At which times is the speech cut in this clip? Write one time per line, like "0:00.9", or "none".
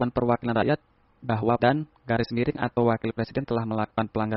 0:01.6